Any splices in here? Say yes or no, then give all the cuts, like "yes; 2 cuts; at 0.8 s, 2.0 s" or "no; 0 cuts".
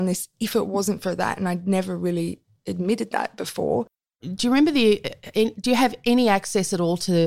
no; 0 cuts